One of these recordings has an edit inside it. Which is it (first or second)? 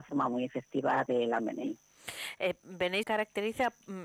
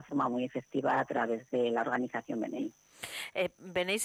first